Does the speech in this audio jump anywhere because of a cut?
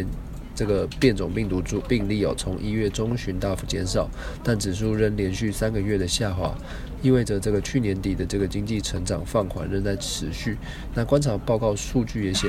yes; 1 cut; at 1.8 s

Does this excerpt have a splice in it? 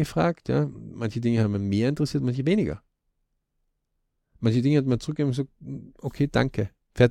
no; 0 cuts

